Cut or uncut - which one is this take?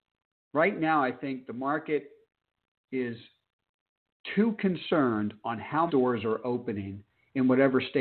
cut